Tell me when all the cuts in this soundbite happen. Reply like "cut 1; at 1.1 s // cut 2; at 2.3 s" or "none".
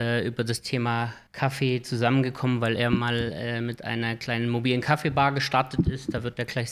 cut 1; at 1.3 s